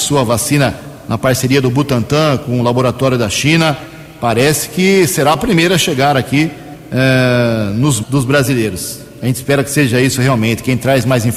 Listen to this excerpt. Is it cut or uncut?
cut